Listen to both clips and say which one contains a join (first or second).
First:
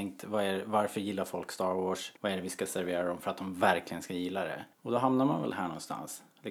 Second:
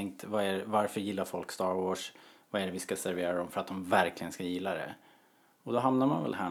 first